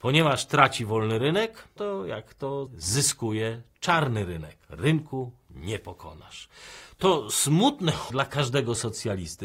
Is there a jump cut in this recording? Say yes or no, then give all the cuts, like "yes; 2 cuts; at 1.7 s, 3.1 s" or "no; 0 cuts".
yes; 4 cuts; at 1.8 s, 2.7 s, 4.6 s, 8.1 s